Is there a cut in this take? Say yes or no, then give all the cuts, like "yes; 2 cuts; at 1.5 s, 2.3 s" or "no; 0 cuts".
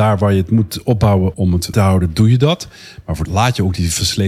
yes; 3 cuts; at 1.3 s, 1.7 s, 3.3 s